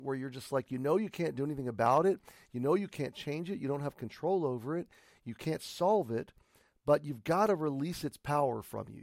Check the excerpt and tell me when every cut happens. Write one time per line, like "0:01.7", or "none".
none